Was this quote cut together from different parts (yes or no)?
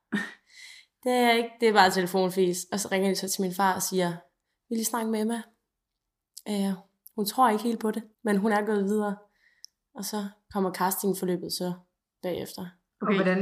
yes